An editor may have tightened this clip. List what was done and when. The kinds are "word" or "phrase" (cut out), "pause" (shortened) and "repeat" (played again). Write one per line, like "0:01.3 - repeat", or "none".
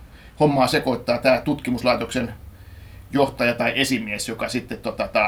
none